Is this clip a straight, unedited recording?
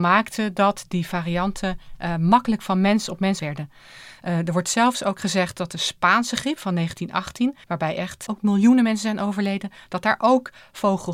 no; 3 cuts; at 3.4 s, 7.6 s, 8.3 s

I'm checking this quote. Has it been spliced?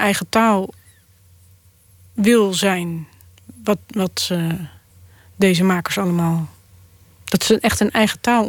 no; 0 cuts

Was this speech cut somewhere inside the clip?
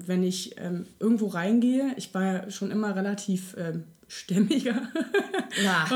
no; 0 cuts

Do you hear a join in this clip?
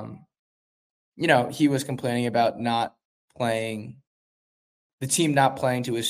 no; 0 cuts

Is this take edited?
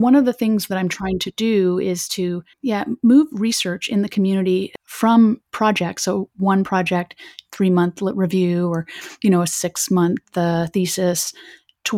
yes; 1 cut; at 2.5 s

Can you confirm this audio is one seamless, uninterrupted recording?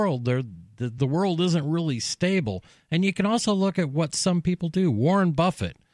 yes; 0 cuts

